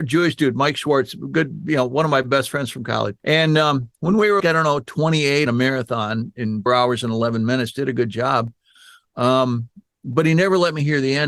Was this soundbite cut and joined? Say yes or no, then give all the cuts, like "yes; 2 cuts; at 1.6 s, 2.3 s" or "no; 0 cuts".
yes; 4 cuts; at 3.2 s, 4.4 s, 5.5 s, 6.7 s